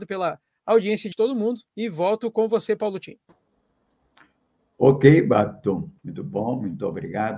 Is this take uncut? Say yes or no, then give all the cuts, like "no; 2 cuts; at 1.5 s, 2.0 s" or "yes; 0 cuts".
no; 3 cuts; at 1.1 s, 1.7 s, 6.0 s